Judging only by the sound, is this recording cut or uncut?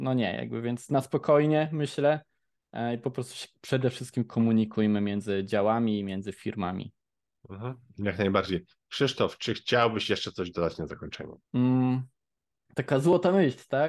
cut